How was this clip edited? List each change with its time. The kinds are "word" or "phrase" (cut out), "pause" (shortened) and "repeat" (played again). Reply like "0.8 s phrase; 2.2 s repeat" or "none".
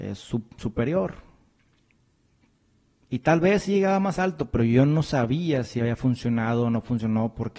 none